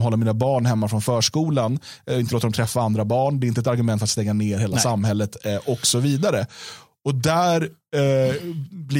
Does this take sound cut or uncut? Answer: uncut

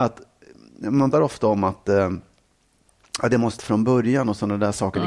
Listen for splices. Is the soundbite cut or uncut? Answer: cut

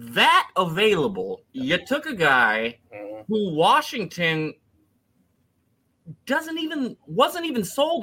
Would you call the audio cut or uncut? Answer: cut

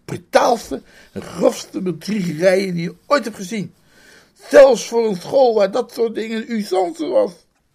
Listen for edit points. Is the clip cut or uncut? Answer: uncut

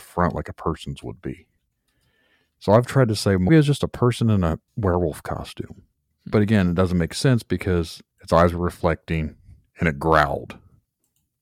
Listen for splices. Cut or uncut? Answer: cut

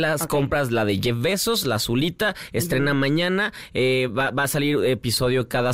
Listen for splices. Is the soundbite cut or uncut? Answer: uncut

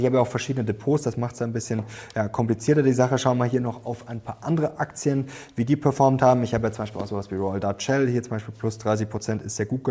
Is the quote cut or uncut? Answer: uncut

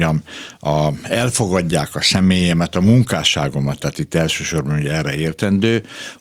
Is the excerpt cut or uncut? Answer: uncut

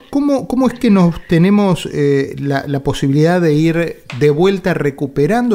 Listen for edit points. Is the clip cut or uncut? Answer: uncut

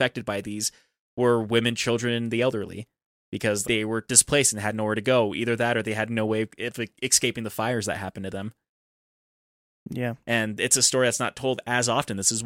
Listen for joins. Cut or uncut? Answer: cut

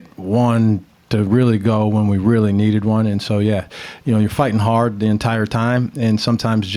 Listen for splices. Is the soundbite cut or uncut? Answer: uncut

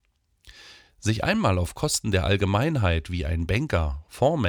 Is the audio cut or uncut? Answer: uncut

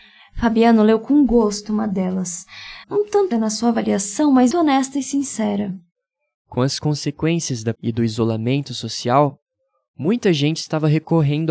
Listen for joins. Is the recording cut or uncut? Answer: cut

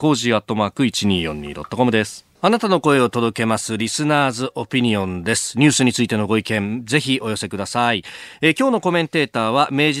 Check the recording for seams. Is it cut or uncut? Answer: cut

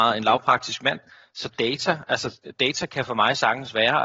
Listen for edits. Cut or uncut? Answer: uncut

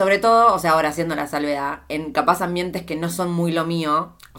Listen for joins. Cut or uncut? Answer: uncut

